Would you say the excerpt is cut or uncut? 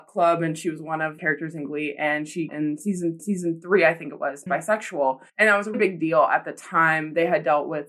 cut